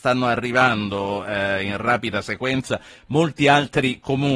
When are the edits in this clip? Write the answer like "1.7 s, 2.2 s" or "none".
none